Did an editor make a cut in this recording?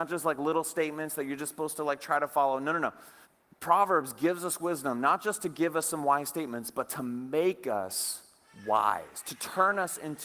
yes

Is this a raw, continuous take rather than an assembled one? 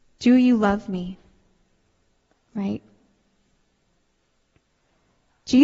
yes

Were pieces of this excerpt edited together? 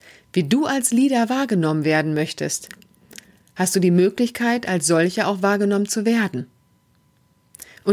no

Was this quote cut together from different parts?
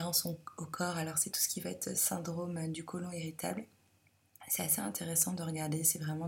no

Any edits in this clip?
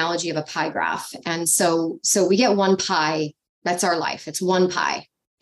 no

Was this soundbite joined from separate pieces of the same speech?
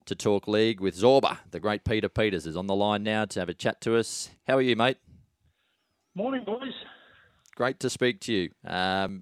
no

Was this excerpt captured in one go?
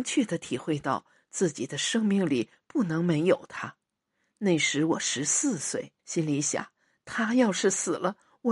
no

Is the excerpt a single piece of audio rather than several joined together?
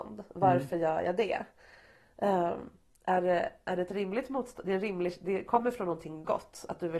yes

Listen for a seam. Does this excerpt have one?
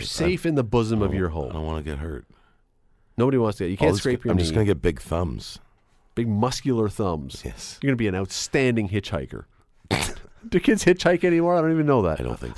no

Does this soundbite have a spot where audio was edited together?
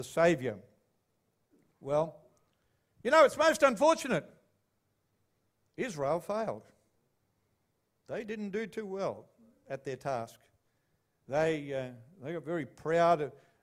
no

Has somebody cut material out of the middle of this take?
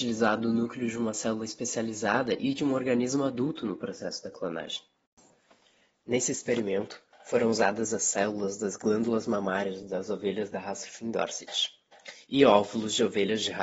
no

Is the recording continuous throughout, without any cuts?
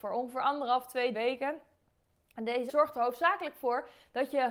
no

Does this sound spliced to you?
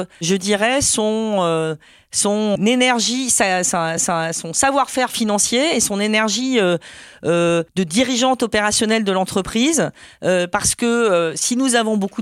yes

